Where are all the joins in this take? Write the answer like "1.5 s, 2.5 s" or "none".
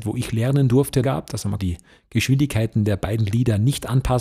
1.0 s, 1.6 s